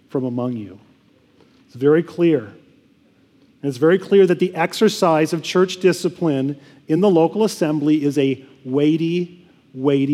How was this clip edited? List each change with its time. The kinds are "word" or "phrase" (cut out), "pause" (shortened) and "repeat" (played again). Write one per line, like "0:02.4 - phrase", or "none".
none